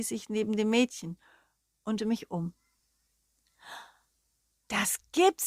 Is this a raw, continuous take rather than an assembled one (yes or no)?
no